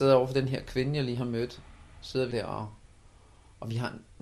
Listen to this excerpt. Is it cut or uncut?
cut